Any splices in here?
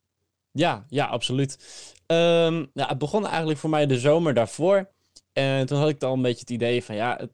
no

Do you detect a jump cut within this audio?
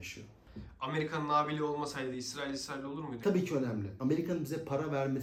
no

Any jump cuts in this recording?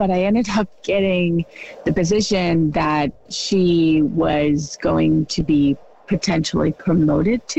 no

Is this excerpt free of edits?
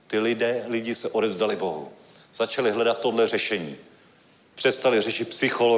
yes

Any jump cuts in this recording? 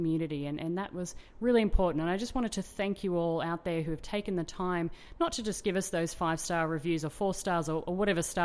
no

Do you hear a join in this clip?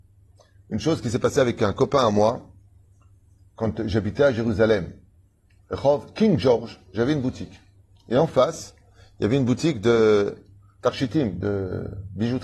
no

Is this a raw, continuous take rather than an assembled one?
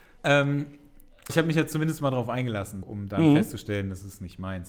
no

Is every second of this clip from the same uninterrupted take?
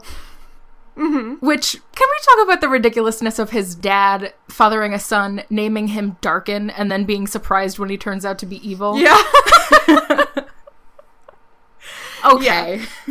yes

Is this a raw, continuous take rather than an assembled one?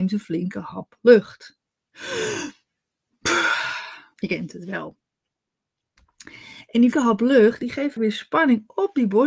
no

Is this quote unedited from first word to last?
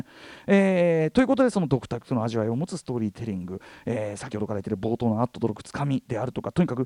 yes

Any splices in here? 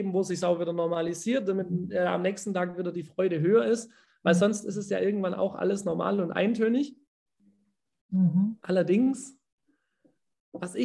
no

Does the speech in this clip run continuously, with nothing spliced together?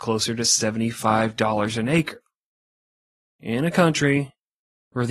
yes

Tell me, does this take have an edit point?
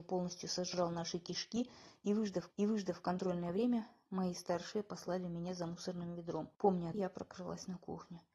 yes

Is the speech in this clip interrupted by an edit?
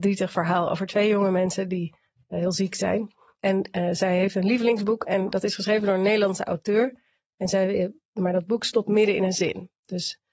no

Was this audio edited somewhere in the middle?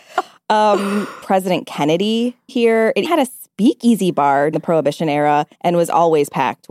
yes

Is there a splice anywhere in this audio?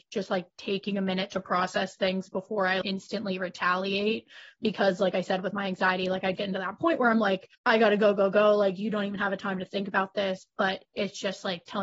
yes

